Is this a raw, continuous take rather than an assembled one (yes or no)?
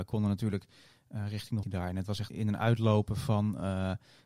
no